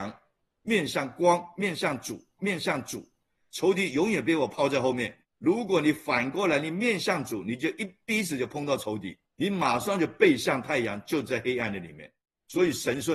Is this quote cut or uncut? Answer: cut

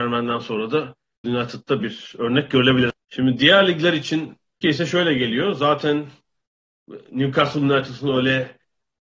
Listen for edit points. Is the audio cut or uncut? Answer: cut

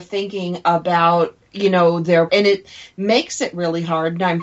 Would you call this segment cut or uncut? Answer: cut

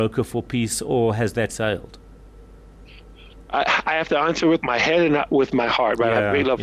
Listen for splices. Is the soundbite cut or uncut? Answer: cut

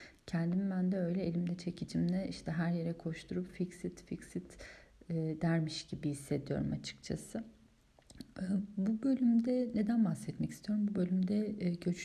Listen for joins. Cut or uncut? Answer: uncut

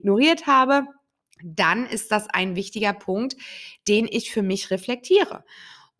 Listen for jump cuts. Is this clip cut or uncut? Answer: uncut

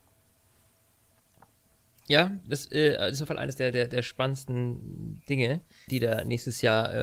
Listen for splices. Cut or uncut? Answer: cut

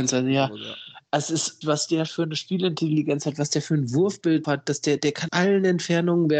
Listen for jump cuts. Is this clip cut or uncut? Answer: cut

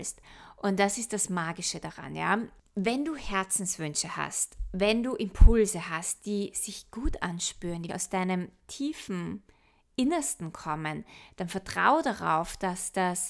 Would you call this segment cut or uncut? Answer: cut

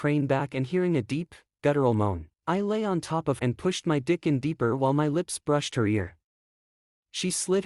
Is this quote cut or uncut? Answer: cut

